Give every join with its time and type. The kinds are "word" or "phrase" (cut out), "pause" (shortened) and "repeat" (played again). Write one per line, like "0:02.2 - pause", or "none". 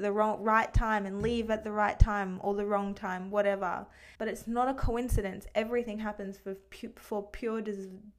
0:04.2 - pause